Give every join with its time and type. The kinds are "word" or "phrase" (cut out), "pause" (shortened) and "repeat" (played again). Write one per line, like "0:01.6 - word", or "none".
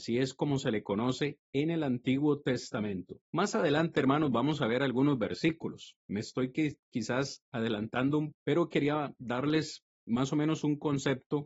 0:03.2 - pause
0:06.0 - pause
0:08.3 - word